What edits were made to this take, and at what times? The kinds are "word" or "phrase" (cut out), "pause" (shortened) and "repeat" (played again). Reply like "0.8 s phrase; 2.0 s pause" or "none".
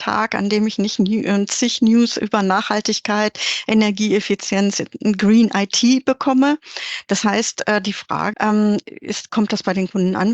8.3 s word